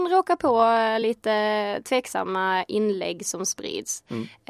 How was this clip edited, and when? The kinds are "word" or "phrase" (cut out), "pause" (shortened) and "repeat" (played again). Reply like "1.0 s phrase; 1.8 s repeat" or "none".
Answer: none